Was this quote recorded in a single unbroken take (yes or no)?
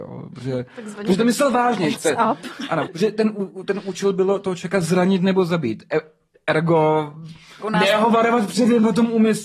no